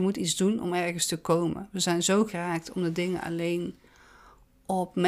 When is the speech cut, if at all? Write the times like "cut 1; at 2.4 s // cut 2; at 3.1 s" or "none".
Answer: cut 1; at 2.3 s